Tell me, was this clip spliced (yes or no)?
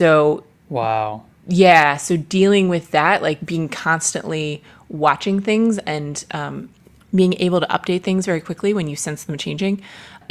no